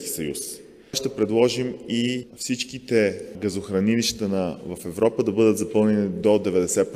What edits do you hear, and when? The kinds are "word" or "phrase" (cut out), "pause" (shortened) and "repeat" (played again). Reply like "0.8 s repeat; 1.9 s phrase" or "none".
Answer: none